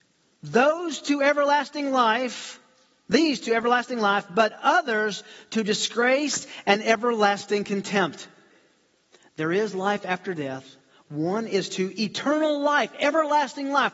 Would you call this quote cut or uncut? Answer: uncut